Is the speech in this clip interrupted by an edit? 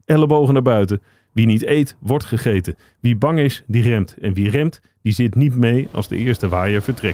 no; 0 cuts

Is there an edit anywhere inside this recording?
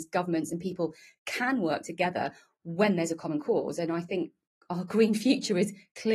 no; 0 cuts

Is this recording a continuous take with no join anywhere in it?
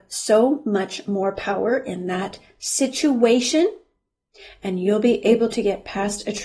yes; 0 cuts

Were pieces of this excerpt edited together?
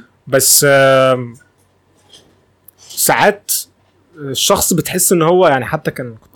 no; 0 cuts

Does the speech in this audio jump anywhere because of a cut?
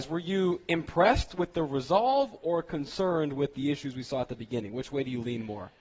no; 0 cuts

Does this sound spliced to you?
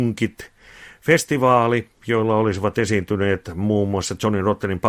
no; 0 cuts

